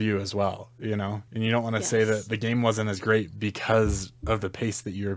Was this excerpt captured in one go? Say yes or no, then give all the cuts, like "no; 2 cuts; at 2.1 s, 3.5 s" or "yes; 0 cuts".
no; 1 cut; at 1.3 s